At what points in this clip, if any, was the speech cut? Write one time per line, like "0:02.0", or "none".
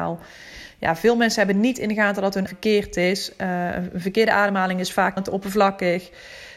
0:02.5
0:05.2